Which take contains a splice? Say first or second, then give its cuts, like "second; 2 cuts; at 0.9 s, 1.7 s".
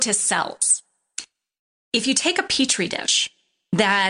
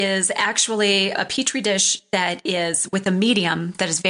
second; 1 cut; at 1.1 s